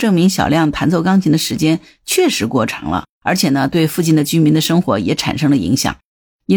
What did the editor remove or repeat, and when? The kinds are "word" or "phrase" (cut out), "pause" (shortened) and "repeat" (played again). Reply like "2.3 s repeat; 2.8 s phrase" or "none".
3.1 s pause